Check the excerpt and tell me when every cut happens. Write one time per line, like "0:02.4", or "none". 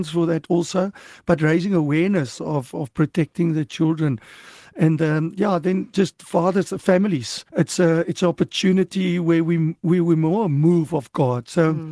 0:07.5